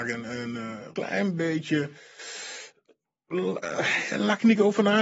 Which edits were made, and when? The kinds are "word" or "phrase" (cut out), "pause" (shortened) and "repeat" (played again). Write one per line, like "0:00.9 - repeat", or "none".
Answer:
0:00.9 - word